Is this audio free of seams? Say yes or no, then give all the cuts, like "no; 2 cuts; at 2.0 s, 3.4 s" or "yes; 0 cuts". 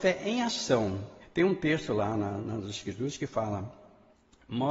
no; 1 cut; at 1.2 s